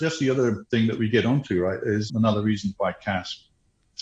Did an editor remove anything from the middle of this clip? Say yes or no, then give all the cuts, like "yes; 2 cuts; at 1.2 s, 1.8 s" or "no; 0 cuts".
yes; 1 cut; at 2.1 s